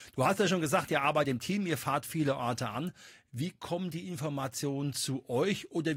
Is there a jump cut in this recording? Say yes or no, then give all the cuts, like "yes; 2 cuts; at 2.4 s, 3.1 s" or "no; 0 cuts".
no; 0 cuts